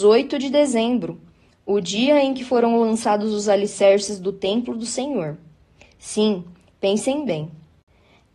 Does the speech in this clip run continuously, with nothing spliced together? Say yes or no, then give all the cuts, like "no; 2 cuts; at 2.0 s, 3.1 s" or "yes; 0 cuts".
yes; 0 cuts